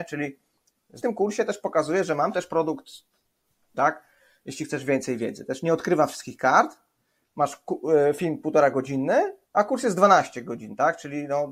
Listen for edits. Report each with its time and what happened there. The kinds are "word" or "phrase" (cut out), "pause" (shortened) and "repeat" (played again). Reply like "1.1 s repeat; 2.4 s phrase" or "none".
1.0 s phrase; 3.7 s word; 9.4 s pause